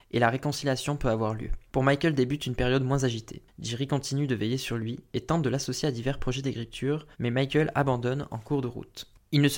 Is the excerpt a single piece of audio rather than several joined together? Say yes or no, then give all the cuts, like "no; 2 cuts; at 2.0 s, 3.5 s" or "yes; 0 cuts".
no; 1 cut; at 7.1 s